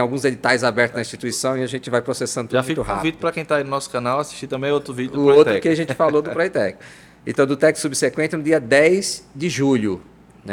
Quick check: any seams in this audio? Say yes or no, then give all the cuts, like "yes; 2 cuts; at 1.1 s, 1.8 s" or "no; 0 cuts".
no; 0 cuts